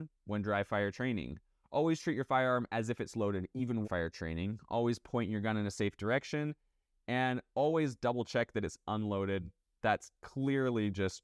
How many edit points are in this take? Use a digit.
1